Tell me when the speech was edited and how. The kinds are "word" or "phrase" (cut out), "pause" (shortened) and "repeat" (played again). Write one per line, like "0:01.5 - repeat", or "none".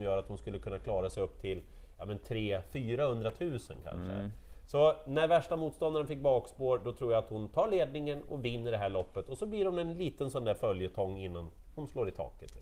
none

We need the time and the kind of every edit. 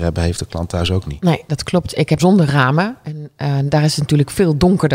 0:02.2 - phrase

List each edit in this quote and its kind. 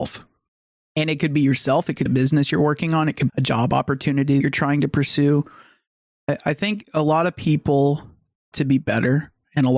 0:02.1 - word
0:03.3 - word
0:04.4 - word
0:08.5 - word

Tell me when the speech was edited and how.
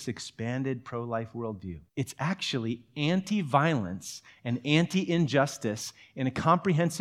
0:01.9 - pause

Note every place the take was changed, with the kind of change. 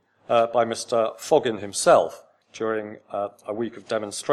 0:02.4 - word

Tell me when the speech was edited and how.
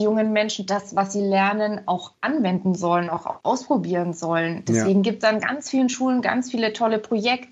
none

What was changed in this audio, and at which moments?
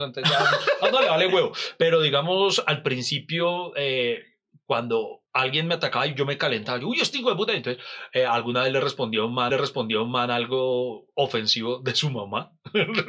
0:05.3 - pause
0:09.5 - repeat

